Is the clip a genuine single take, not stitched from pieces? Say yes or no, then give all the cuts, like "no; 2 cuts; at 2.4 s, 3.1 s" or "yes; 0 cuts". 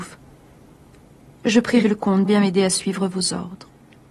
no; 2 cuts; at 1.8 s, 2.2 s